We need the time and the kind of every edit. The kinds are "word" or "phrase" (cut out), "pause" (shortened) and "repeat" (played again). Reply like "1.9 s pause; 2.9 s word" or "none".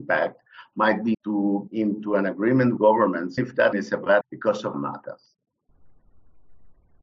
1.1 s word; 1.7 s word; 2.8 s word; 3.4 s word; 3.7 s word; 4.2 s word; 4.7 s word